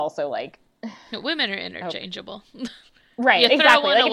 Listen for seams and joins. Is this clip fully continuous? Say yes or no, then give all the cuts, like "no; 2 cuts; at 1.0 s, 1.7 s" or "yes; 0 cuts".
yes; 0 cuts